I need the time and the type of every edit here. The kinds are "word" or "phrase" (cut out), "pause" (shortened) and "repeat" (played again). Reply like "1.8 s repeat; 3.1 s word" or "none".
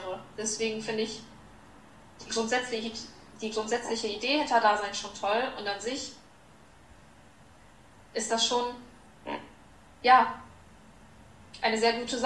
none